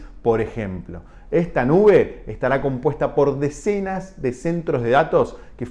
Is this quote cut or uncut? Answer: uncut